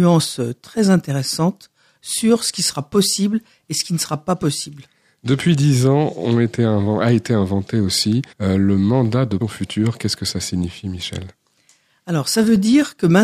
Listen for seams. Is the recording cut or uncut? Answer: cut